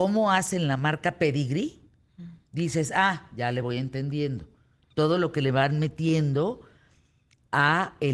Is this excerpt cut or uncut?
uncut